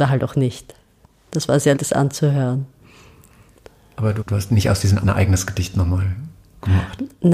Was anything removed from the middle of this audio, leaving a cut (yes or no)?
yes